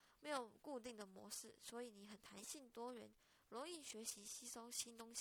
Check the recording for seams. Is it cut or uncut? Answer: uncut